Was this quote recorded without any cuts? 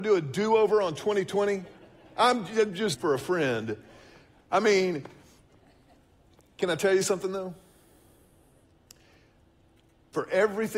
no; 1 cut; at 2.9 s

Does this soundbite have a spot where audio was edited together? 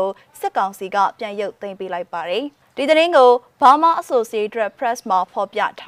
no; 0 cuts

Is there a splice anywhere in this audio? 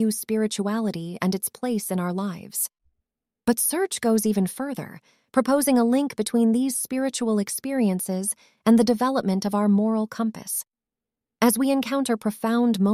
no; 0 cuts

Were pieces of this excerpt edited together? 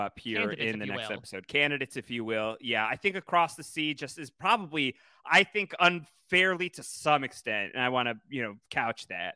no; 0 cuts

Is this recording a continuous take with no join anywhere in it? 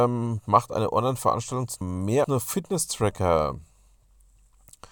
no; 2 cuts; at 1.8 s, 2.2 s

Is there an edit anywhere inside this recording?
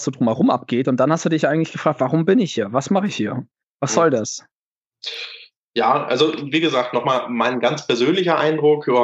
no; 0 cuts

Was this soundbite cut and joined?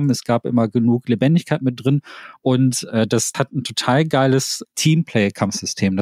yes; 2 cuts; at 3.3 s, 4.6 s

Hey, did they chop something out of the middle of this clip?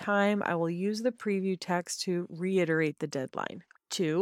no; 0 cuts

